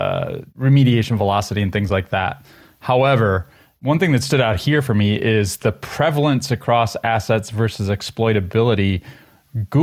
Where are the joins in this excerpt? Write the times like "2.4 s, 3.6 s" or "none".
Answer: none